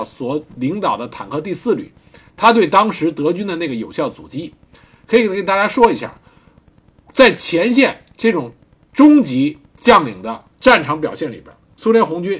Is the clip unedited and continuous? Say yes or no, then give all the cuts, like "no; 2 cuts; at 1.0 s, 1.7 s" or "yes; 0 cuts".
no; 1 cut; at 10.5 s